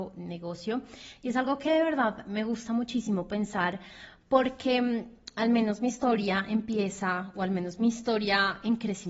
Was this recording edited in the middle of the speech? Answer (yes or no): no